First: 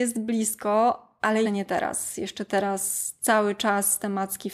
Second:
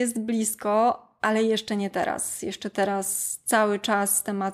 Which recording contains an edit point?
first; 1 cut; at 1.4 s

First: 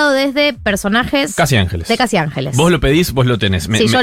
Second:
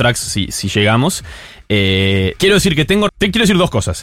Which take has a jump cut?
second; 2 cuts; at 2.4 s, 3.1 s

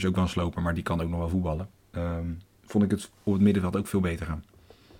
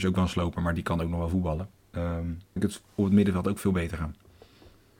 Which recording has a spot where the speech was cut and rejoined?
second; 1 cut; at 2.6 s

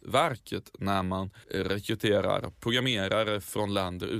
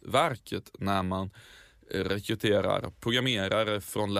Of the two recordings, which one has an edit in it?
first; 1 cut; at 1.4 s

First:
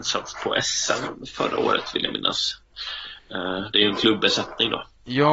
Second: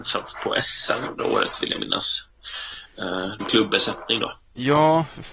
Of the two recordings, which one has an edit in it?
second; 2 cuts; at 1.2 s, 3.4 s

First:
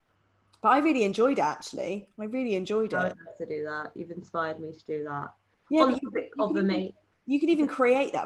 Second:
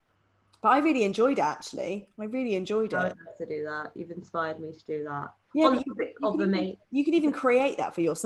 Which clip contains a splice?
second; 2 cuts; at 5.4 s, 6.8 s

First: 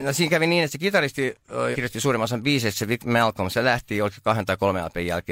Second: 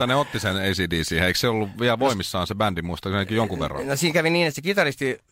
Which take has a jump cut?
first; 1 cut; at 1.7 s

